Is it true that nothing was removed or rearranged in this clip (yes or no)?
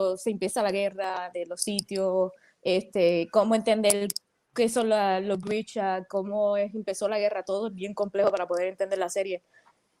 yes